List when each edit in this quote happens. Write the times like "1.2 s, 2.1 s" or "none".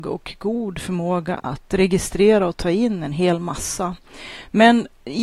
none